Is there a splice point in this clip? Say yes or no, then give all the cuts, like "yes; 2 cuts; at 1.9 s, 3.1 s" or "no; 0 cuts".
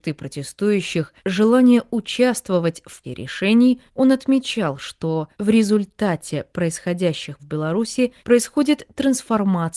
yes; 6 cuts; at 1.2 s, 3.0 s, 3.9 s, 5.3 s, 7.4 s, 8.2 s